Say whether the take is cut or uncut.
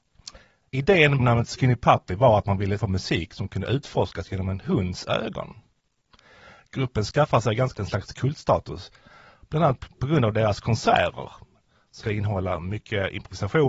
cut